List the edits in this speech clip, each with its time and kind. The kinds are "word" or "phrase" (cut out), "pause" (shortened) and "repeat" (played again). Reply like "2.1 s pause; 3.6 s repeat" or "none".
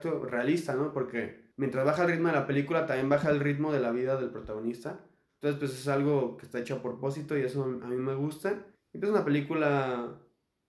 1.5 s pause; 8.7 s pause